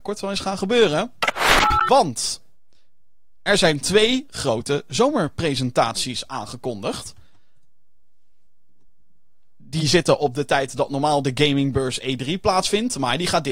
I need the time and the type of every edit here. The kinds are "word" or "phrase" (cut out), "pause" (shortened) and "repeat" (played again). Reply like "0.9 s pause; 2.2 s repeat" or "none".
none

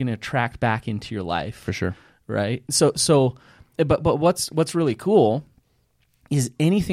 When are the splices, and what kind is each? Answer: none

